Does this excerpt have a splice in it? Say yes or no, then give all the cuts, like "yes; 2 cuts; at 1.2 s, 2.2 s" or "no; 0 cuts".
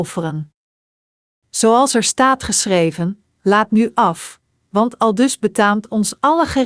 no; 0 cuts